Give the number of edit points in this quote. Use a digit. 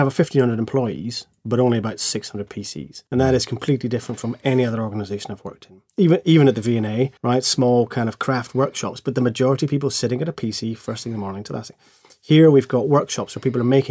2